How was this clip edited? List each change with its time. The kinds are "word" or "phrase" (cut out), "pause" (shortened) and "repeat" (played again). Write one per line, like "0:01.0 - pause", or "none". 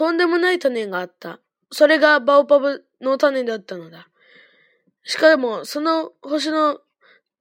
none

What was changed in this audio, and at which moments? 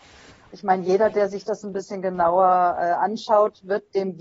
none

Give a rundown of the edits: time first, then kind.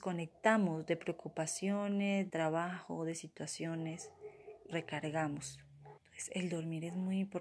0:02.3 - word
0:04.7 - word
0:06.0 - pause

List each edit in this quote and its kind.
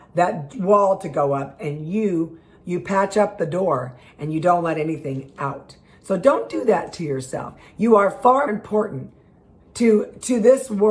0:02.6 - word
0:08.5 - word

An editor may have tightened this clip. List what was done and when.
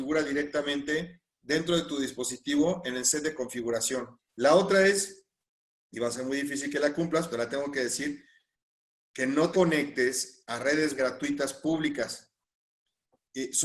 0:07.3 - word
0:09.5 - word
0:11.0 - word

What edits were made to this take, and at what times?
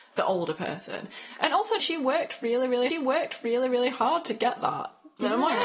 0:01.8 - phrase
0:02.9 - repeat

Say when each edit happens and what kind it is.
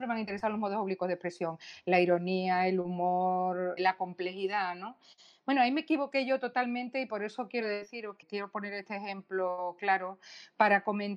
0:03.8 - word
0:08.2 - word

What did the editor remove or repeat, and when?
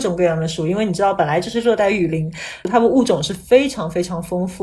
0:02.6 - pause

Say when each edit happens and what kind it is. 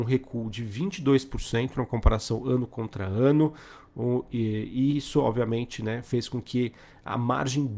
none

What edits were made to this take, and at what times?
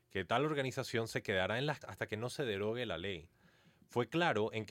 0:01.8 - word

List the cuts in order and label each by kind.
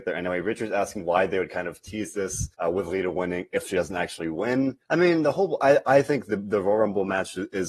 0:02.5 - pause
0:04.8 - pause

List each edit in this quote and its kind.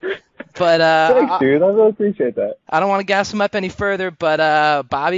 none

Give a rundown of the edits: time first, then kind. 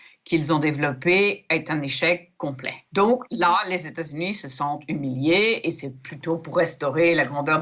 0:02.9 - pause

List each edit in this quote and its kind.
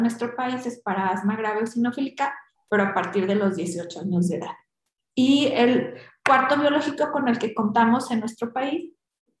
none

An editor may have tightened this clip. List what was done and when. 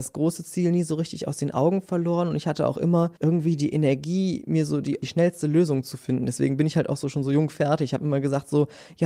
0:03.2 - pause

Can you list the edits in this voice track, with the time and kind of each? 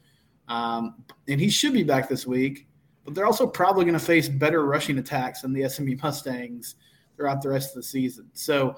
none

